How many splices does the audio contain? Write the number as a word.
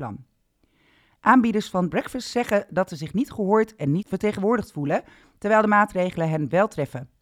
one